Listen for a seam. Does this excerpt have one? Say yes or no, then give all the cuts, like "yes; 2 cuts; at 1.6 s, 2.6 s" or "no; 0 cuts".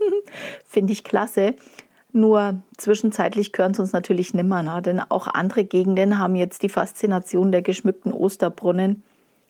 no; 0 cuts